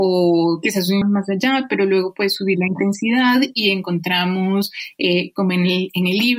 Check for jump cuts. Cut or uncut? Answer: cut